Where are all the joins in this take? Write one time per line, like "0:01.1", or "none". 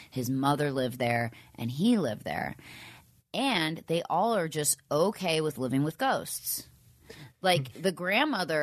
none